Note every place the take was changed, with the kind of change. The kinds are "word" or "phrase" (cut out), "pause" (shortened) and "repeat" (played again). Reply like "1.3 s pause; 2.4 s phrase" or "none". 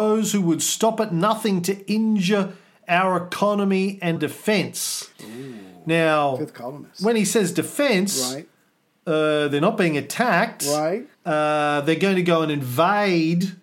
4.2 s word; 5.1 s pause; 11.1 s pause